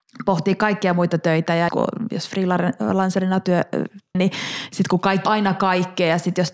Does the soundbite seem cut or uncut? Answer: cut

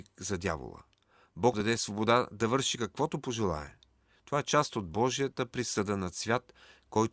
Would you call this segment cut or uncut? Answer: cut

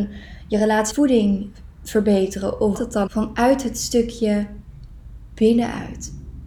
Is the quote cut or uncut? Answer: cut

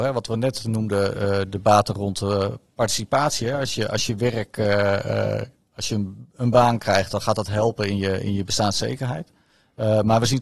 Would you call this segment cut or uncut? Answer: uncut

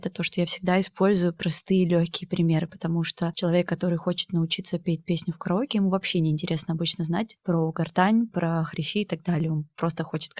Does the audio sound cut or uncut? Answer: uncut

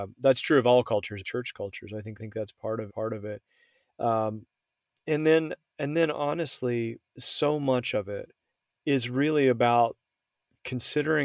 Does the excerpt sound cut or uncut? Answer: cut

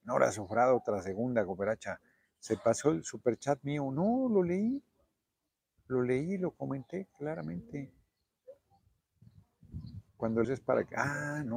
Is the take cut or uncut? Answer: cut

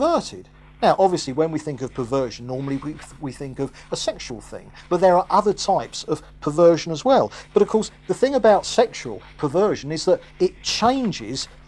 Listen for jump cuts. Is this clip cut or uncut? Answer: uncut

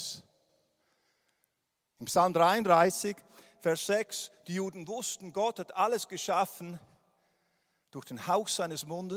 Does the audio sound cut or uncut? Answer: uncut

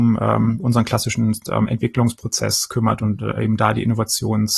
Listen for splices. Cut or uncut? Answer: uncut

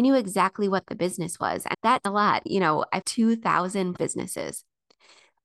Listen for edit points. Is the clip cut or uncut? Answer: cut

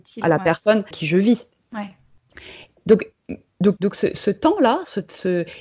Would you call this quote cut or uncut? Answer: cut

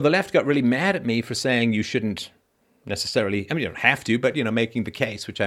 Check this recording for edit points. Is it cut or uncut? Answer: uncut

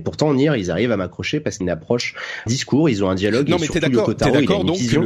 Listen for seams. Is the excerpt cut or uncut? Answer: cut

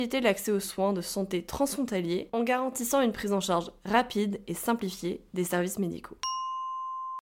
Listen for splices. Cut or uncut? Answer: uncut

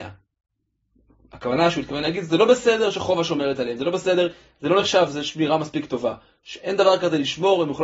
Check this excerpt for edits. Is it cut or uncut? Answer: uncut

